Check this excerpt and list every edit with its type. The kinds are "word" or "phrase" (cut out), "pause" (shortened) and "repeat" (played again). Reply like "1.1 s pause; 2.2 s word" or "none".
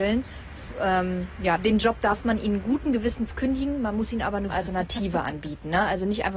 1.6 s word; 4.5 s word